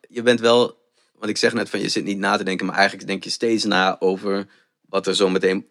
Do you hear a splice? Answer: no; 0 cuts

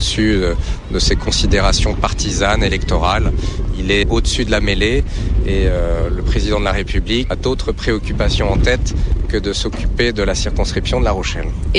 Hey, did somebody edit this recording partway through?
yes; 2 cuts; at 4.0 s, 7.3 s

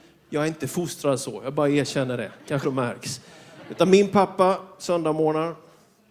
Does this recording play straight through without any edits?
no; 1 cut; at 2.6 s

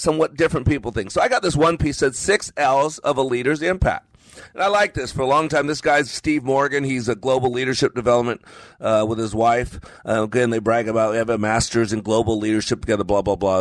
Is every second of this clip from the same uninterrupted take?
yes; 0 cuts

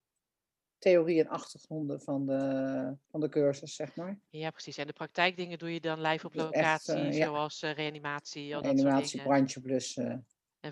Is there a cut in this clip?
yes; 1 cut; at 3.0 s

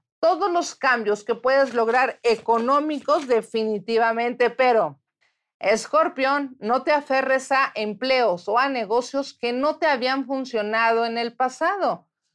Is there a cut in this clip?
yes; 1 cut; at 5.2 s

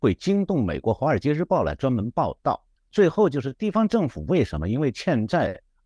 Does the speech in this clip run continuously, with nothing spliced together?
no; 1 cut; at 2.8 s

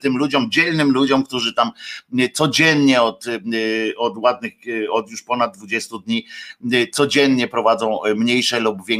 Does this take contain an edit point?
no; 0 cuts

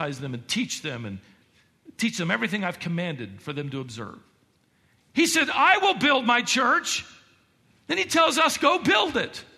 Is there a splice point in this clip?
no; 0 cuts

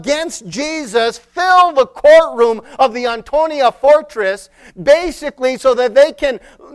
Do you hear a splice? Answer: no; 0 cuts

